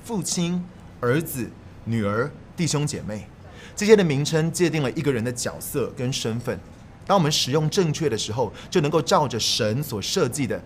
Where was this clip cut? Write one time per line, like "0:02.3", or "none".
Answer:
0:02.5